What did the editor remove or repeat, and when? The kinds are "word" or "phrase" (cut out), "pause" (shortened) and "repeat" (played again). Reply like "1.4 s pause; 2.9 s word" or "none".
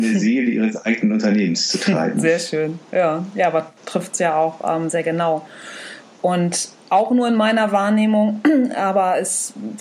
4.9 s word